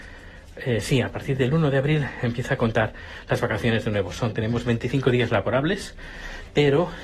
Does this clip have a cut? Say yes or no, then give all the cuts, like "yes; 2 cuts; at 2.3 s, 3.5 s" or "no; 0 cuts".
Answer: no; 0 cuts